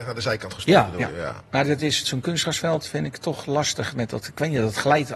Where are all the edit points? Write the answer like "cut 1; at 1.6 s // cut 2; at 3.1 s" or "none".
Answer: cut 1; at 2.0 s